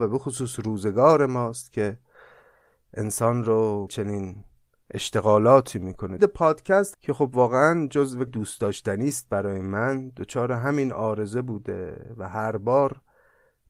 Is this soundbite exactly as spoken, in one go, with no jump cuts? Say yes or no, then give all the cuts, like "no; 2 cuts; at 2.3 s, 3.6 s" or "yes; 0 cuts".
no; 4 cuts; at 3.9 s, 6.2 s, 6.9 s, 8.3 s